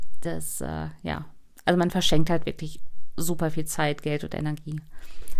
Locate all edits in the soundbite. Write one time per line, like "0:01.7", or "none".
none